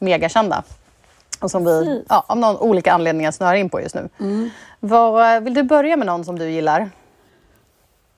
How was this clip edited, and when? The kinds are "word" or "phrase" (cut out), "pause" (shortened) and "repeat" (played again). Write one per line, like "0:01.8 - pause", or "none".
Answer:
none